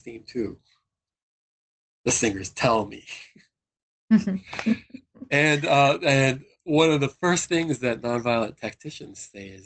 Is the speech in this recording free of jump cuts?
yes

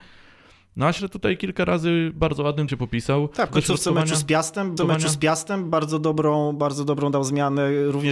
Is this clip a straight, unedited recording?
no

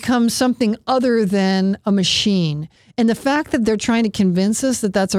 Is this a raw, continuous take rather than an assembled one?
yes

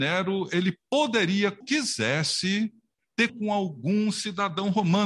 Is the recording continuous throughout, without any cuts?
no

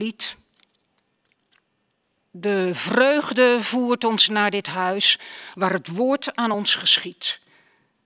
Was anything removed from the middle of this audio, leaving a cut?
no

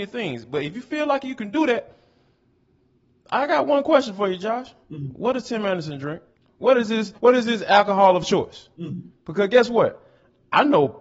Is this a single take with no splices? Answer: no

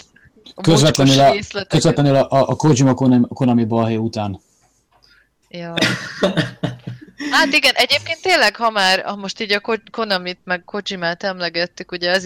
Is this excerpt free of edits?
yes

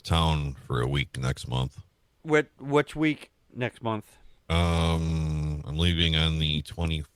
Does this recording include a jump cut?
yes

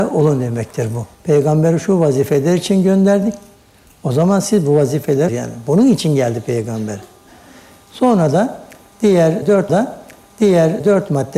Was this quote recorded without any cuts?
no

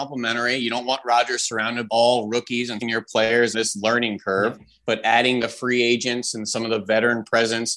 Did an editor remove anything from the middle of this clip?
yes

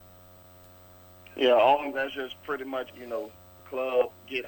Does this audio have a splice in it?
yes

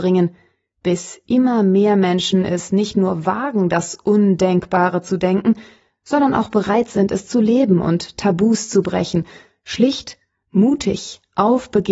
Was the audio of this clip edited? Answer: no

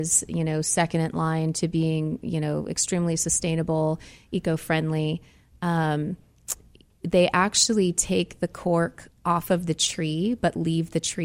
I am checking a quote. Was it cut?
no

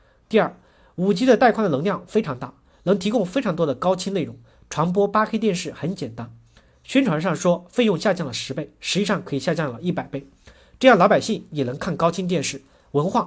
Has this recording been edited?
no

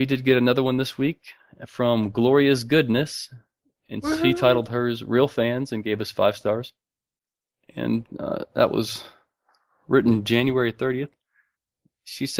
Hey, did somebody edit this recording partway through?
no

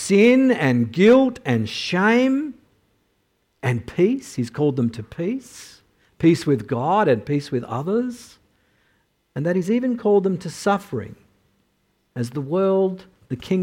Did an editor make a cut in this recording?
no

